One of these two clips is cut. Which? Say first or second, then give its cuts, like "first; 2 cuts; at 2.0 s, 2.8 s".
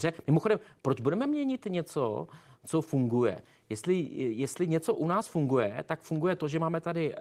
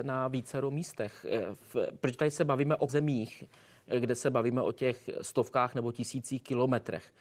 second; 1 cut; at 2.9 s